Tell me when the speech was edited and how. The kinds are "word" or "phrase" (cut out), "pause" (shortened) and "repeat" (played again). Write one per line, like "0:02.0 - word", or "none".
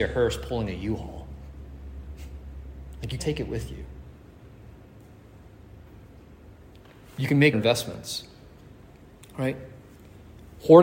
0:03.2 - word
0:07.5 - word